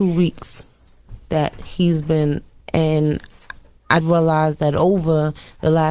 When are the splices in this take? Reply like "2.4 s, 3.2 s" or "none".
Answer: 2.6 s, 4.0 s